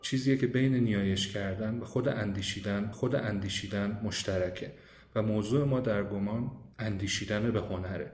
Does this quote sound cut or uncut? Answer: cut